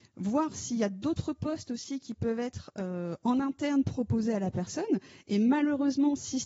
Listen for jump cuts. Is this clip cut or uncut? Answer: uncut